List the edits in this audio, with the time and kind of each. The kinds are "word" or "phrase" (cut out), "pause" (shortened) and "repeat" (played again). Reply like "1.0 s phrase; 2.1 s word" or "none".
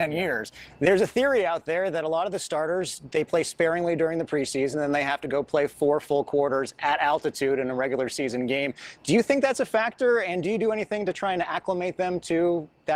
none

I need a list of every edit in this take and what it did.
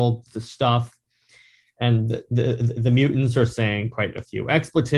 none

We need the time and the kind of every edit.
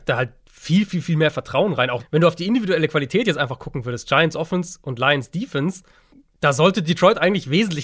2.0 s word; 6.1 s pause

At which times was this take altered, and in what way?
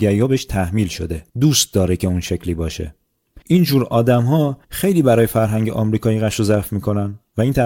1.3 s pause; 3.4 s pause; 4.6 s pause

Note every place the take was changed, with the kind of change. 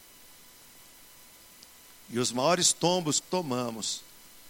3.2 s phrase

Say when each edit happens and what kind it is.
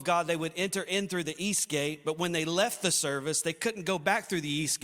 none

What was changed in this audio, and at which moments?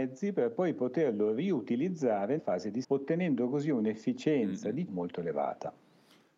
2.4 s word; 2.8 s word; 4.9 s word

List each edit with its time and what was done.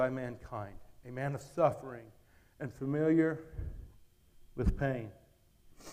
none

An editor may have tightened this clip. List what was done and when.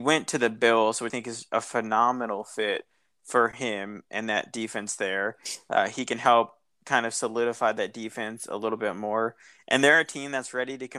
1.1 s word

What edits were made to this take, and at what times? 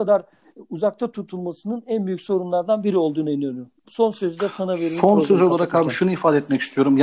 3.8 s pause

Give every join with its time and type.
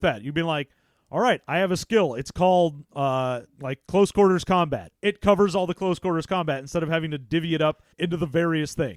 5.0 s pause; 7.9 s pause

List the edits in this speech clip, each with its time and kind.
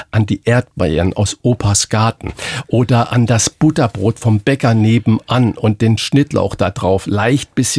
6.0 s word

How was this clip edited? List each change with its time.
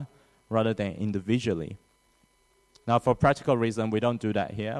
none

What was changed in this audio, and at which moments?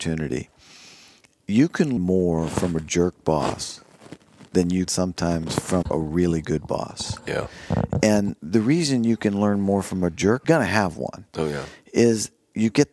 2.0 s word; 4.5 s pause; 4.9 s word; 5.8 s word; 8.4 s pause; 10.4 s phrase

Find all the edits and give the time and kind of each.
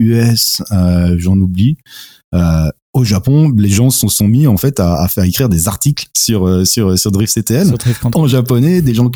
none

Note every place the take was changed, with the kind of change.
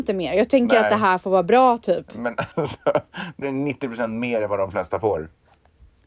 2.5 s pause; 3.4 s word

